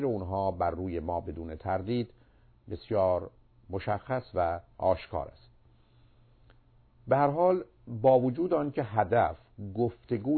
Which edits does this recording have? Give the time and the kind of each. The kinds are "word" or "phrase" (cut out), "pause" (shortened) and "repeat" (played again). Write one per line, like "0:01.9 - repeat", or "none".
none

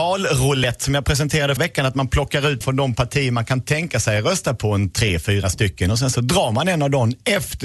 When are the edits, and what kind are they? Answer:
0:01.6 - word
0:02.6 - word

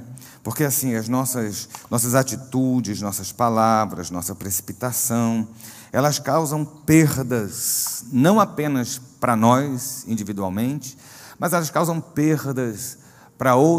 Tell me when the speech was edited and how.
none

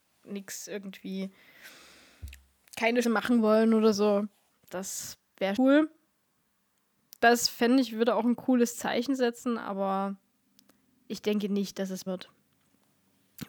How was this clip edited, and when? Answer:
0:03.0 - word
0:05.6 - word
0:12.1 - word

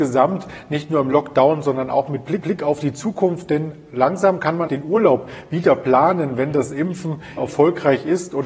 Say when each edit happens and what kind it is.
0:02.4 - repeat
0:04.7 - word
0:07.4 - word

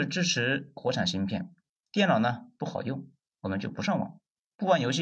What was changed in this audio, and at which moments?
none

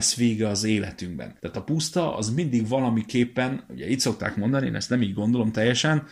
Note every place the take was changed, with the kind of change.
0:01.4 - pause

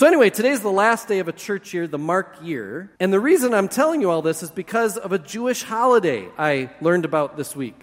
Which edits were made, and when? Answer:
0:03.0 - pause

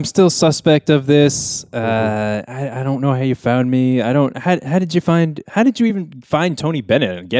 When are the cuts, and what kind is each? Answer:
none

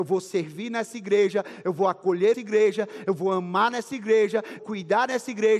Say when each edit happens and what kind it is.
0:02.3 - word
0:04.6 - phrase

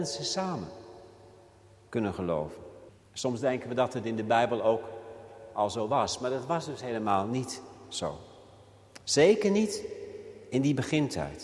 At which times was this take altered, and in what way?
0:02.9 - pause

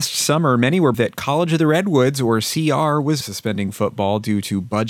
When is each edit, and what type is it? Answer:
0:00.9 - word
0:03.2 - word

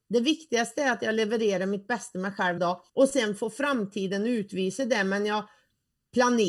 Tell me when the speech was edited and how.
0:02.6 - word
0:02.9 - pause

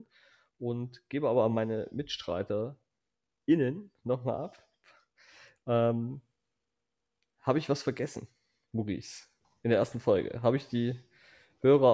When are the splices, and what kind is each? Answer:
none

